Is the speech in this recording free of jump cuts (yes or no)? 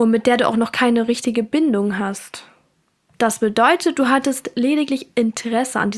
yes